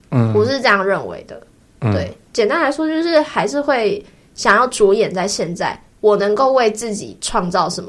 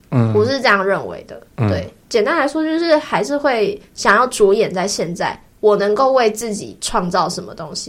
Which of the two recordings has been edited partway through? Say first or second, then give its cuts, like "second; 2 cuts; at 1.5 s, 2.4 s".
second; 2 cuts; at 1.5 s, 3.9 s